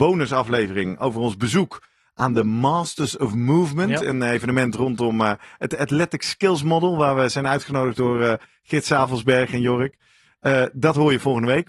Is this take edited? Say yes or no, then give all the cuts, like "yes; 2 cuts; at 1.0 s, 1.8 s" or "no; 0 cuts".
no; 0 cuts